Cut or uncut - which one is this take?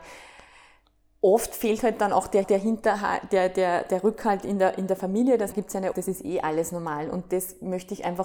cut